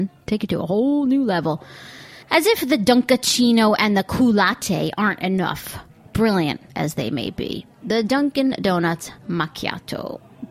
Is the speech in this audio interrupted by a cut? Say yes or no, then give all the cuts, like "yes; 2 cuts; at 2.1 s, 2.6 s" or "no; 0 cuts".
yes; 3 cuts; at 2.2 s, 6.7 s, 9.2 s